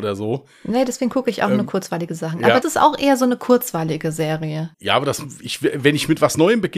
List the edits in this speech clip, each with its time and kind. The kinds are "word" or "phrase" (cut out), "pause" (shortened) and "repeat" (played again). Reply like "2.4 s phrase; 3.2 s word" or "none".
2.6 s word; 4.7 s pause